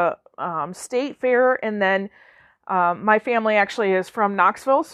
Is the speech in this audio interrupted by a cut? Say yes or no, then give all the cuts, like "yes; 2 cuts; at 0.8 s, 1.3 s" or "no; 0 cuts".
no; 0 cuts